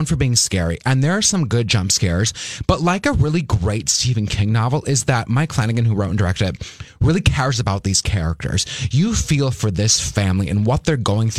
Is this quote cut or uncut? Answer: uncut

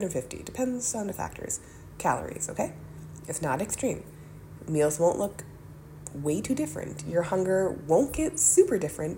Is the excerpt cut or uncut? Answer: cut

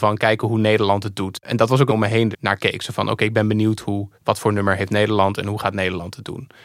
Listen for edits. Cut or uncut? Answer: cut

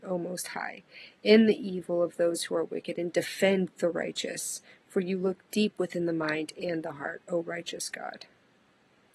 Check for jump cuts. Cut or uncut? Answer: uncut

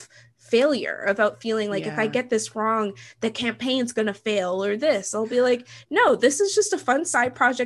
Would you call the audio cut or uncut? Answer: uncut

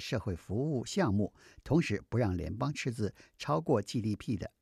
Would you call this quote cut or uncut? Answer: uncut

